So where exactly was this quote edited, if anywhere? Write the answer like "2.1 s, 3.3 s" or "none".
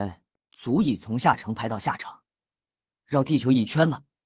none